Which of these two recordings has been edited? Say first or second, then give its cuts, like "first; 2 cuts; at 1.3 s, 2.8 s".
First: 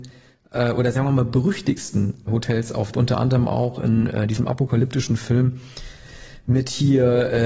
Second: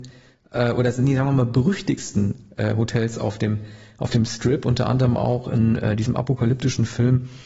first; 3 cuts; at 0.9 s, 2.3 s, 2.9 s